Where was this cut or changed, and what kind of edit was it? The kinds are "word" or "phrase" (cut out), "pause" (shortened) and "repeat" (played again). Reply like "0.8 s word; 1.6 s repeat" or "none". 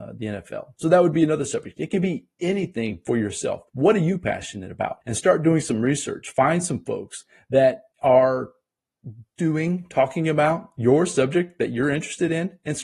3.7 s pause; 5.0 s pause; 7.9 s pause